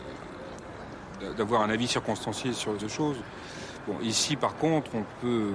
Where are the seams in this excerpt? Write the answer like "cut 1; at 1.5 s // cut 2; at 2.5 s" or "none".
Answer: cut 1; at 2.8 s